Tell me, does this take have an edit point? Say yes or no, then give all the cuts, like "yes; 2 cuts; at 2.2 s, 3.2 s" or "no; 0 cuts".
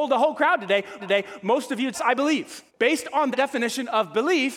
yes; 4 cuts; at 1.0 s, 1.9 s, 2.7 s, 3.3 s